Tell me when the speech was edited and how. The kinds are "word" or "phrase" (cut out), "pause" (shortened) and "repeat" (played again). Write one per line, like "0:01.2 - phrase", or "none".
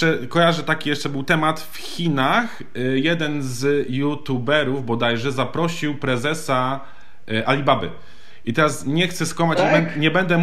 none